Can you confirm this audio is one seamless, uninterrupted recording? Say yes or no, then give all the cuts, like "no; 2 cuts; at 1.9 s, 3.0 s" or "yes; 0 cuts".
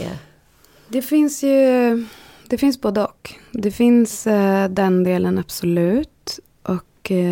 yes; 0 cuts